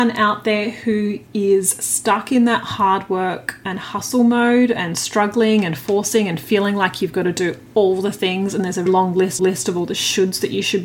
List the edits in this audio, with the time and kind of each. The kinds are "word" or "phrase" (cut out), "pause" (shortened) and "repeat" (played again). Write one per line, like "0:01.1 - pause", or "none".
0:08.9 - word
0:09.4 - repeat